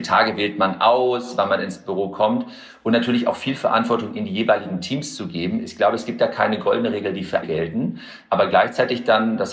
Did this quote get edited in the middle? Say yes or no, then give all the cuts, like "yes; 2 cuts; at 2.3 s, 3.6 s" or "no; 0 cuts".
yes; 1 cut; at 7.4 s